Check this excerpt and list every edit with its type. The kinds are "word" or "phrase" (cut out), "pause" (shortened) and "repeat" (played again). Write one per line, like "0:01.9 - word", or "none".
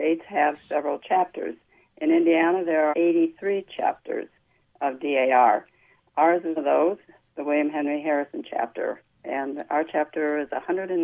0:02.9 - word
0:06.6 - word